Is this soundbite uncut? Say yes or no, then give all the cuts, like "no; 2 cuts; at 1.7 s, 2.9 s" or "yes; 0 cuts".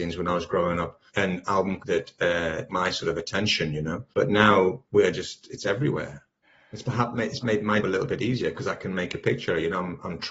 no; 7 cuts; at 1.1 s, 1.8 s, 2.7 s, 4.1 s, 6.4 s, 7.4 s, 7.8 s